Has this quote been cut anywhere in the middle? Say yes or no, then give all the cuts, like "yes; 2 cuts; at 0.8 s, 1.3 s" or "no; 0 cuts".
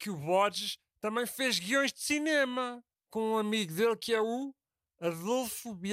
yes; 1 cut; at 2.9 s